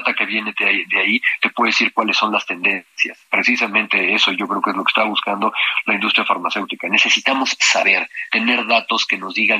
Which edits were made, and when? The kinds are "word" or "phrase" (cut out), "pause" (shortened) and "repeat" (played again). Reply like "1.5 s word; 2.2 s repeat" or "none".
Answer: none